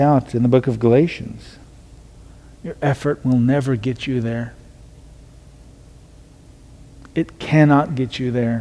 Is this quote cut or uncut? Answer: uncut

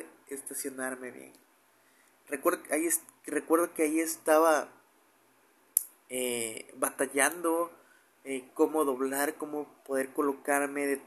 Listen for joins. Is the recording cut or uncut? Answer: uncut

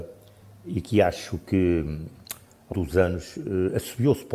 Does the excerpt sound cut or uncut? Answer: cut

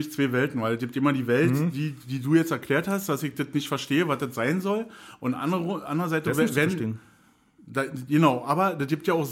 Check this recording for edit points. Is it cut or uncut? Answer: uncut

